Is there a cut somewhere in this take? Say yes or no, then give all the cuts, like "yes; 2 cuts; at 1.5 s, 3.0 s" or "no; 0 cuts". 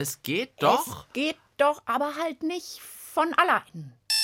no; 0 cuts